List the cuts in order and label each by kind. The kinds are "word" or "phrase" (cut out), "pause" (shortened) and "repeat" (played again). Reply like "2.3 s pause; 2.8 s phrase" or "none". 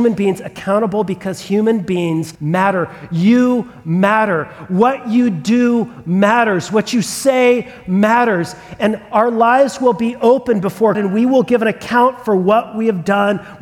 2.4 s pause; 10.9 s word